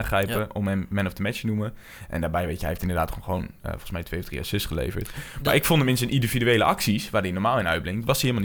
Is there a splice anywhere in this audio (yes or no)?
no